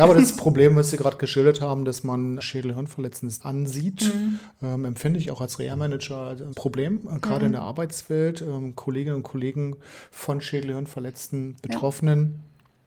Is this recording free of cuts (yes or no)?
no